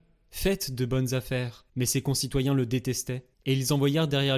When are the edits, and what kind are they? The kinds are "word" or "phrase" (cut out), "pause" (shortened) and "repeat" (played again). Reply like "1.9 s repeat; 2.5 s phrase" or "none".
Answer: 1.7 s pause; 3.3 s pause